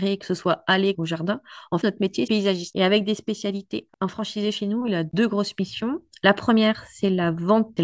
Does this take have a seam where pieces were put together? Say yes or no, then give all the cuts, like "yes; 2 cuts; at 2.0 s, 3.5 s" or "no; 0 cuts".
yes; 3 cuts; at 0.9 s, 1.8 s, 2.3 s